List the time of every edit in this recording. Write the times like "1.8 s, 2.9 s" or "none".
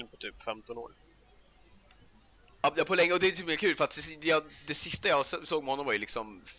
none